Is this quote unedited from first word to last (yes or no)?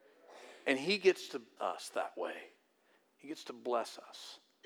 no